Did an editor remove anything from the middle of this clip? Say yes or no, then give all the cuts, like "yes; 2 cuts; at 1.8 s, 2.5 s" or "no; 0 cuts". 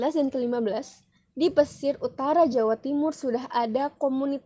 no; 0 cuts